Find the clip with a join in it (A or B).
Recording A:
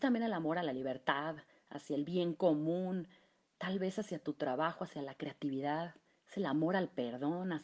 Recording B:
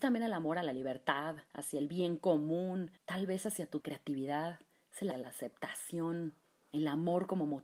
B